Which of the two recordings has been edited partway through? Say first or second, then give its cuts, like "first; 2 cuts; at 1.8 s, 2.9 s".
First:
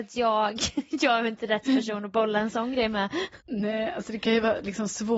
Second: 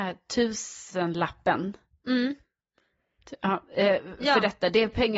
first; 1 cut; at 3.4 s